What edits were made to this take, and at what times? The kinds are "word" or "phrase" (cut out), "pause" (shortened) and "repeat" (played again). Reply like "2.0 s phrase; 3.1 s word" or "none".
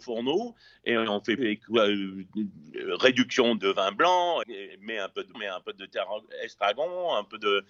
1.4 s word; 3.6 s word; 4.4 s word; 5.3 s word